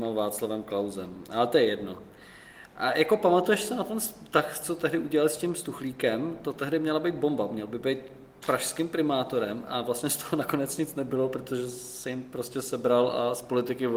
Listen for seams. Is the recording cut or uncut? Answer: uncut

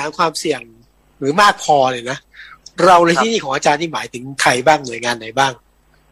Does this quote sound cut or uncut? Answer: uncut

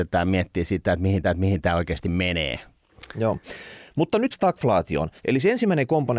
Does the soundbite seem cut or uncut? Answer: cut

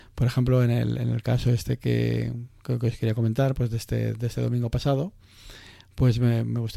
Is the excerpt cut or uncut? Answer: uncut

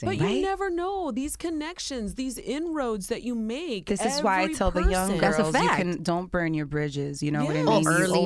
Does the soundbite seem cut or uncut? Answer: uncut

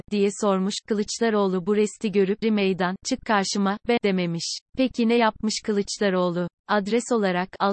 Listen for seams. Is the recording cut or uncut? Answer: cut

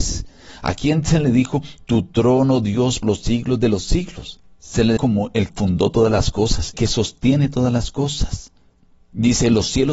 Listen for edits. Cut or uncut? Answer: cut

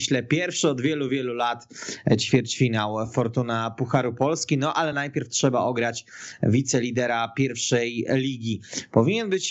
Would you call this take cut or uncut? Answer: uncut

